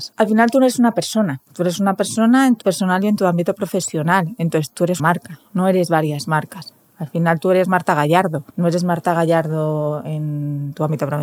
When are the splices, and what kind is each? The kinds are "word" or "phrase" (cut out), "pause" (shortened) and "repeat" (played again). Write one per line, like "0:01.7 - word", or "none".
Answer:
0:01.5 - pause
0:02.6 - word
0:05.0 - word
0:08.5 - pause